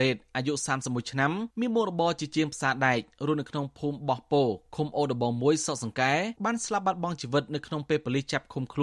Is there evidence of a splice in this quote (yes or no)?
yes